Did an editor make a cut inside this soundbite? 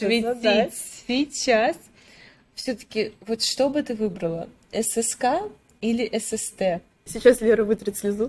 no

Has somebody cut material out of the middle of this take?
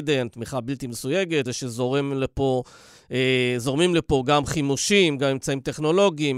yes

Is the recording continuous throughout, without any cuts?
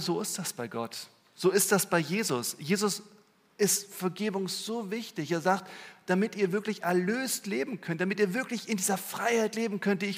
yes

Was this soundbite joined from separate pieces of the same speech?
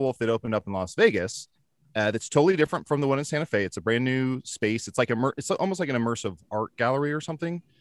no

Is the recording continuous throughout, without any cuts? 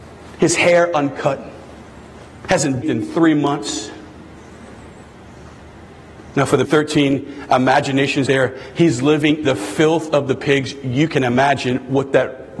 no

